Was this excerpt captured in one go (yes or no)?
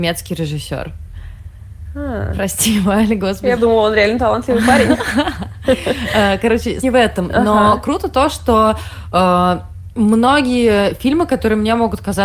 no